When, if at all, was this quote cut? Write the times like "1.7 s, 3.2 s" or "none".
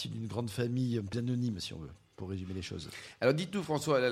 1.1 s